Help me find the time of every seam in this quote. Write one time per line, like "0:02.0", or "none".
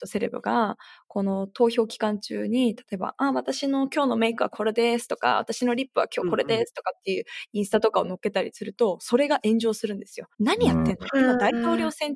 0:10.3